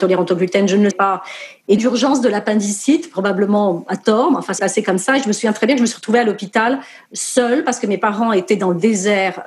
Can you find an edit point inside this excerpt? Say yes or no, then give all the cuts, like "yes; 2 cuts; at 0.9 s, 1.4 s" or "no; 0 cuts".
yes; 3 cuts; at 0.9 s, 1.8 s, 4.6 s